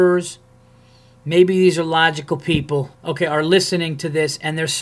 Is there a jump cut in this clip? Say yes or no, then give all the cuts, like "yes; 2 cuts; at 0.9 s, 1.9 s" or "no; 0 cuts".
yes; 1 cut; at 2.9 s